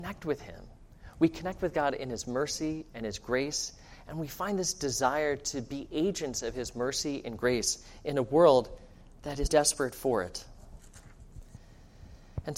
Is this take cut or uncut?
cut